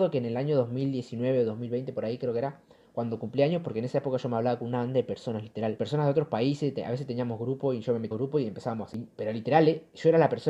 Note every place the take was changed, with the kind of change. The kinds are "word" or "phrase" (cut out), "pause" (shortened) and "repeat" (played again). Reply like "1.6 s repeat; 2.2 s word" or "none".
8.1 s word; 8.9 s word